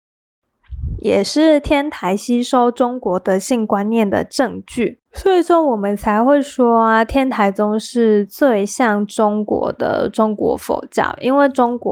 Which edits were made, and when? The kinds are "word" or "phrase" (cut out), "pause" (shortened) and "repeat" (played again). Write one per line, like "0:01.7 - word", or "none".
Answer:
0:05.1 - pause